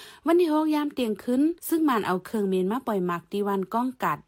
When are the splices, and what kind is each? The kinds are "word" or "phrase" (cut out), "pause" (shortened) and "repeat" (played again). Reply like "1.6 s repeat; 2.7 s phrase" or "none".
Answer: 1.6 s pause